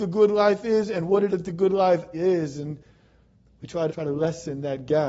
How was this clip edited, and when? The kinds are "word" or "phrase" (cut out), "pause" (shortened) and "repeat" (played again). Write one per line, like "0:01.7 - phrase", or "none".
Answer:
0:01.3 - word
0:02.1 - word
0:03.9 - word